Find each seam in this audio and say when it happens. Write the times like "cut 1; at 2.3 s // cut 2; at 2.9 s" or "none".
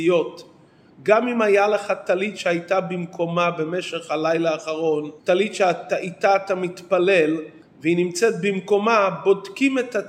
cut 1; at 5.2 s // cut 2; at 7.6 s